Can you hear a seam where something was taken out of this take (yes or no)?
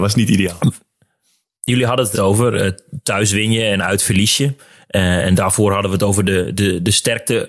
yes